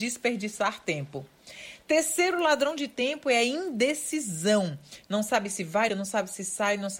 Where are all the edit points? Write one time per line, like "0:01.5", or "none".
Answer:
0:05.9